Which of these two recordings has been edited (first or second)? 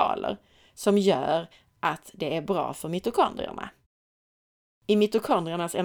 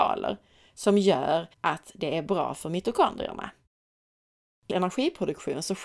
second